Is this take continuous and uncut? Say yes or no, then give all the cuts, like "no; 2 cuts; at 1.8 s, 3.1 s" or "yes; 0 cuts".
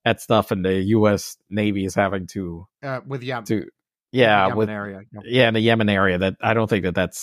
yes; 0 cuts